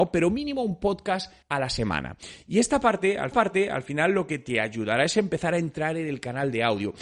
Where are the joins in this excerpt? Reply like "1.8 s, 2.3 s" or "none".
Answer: 1.4 s, 3.3 s